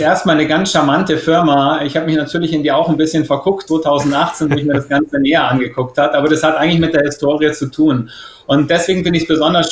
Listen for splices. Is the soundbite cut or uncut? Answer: cut